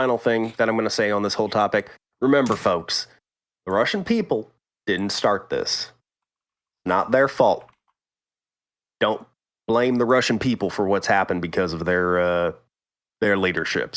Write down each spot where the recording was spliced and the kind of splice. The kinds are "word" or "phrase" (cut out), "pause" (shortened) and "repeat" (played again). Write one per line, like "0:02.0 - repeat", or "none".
none